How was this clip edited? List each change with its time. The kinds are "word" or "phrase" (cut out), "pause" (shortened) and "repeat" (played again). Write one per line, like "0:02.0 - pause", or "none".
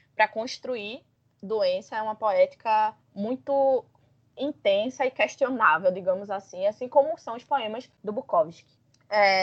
0:03.0 - pause
0:08.0 - pause